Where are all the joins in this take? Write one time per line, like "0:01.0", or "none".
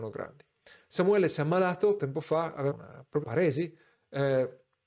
0:02.0
0:02.7
0:03.2